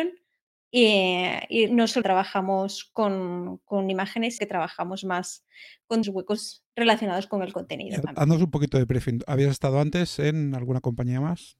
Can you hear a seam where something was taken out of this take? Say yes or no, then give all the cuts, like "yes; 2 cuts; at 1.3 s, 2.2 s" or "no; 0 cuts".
yes; 4 cuts; at 1.7 s, 2.0 s, 4.4 s, 6.0 s